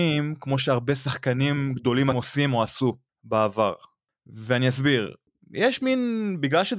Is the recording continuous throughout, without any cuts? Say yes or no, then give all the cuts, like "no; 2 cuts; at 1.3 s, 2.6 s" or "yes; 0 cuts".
no; 1 cut; at 2.1 s